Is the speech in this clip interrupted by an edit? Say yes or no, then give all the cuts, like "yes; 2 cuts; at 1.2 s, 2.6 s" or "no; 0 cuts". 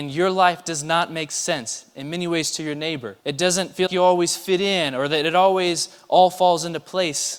yes; 2 cuts; at 3.2 s, 3.9 s